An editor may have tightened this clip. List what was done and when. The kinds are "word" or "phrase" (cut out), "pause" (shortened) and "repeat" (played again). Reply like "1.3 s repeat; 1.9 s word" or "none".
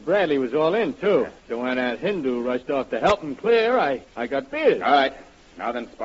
1.4 s pause; 4.1 s pause